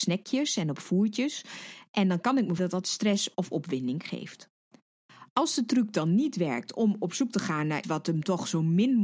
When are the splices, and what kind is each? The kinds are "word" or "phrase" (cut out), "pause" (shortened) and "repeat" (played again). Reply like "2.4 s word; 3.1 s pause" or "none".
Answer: 2.6 s word; 7.8 s word